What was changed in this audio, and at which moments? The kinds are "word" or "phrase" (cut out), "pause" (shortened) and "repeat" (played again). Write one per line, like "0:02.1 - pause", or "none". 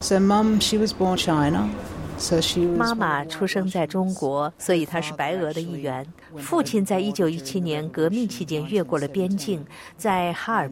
0:01.2 - word

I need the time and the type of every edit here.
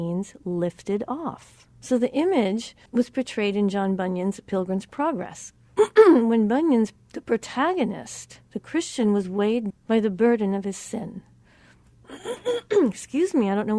0:01.7 - pause
0:02.9 - pause
0:07.0 - pause
0:08.4 - pause
0:09.7 - word

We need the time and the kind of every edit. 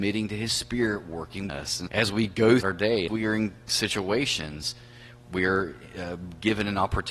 0:01.5 - word
0:01.9 - word
0:02.6 - word
0:03.1 - phrase
0:03.7 - word
0:05.2 - word

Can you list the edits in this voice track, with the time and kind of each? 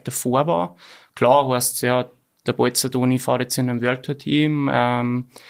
none

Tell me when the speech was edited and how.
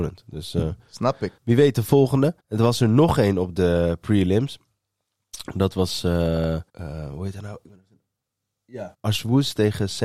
0:01.4 - pause
0:02.4 - pause
0:06.7 - pause
0:08.9 - pause

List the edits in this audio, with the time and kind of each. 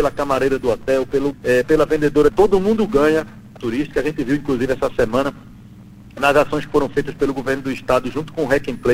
0:01.3 - word
0:01.6 - word
0:02.3 - phrase
0:03.6 - phrase

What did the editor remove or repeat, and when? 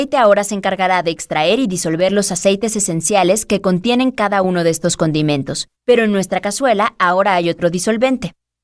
0:05.8 - pause

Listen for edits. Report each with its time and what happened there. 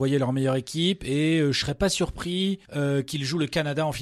0:02.6 - pause

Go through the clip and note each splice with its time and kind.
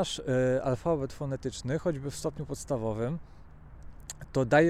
none

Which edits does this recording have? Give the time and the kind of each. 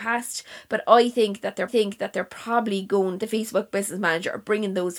0:01.7 - repeat
0:03.2 - phrase

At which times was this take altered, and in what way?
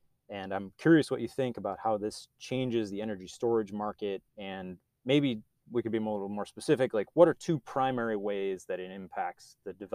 0:04.3 - pause

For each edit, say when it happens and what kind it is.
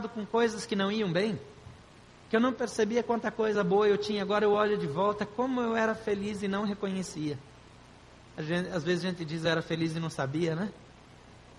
none

